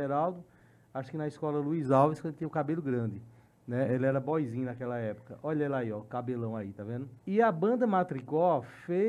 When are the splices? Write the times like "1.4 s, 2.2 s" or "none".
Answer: 7.2 s